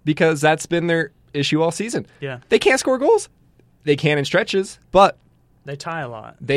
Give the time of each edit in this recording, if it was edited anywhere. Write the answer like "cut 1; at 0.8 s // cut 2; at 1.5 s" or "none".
cut 1; at 4.8 s